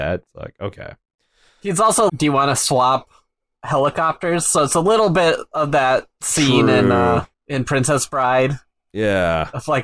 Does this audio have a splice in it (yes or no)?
yes